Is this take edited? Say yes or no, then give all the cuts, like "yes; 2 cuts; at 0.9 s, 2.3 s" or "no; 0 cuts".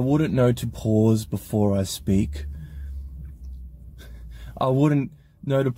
no; 0 cuts